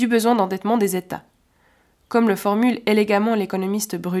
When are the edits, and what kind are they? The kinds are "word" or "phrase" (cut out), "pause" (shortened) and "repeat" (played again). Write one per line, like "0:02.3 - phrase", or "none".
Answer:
none